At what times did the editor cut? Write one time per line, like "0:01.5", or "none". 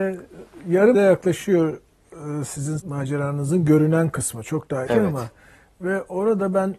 0:00.9
0:02.8
0:04.9